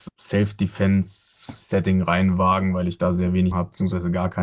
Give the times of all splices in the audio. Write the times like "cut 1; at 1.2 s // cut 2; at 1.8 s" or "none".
cut 1; at 3.5 s